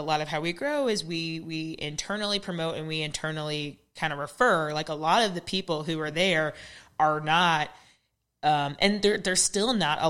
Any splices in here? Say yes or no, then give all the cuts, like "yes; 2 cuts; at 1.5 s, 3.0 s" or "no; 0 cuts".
no; 0 cuts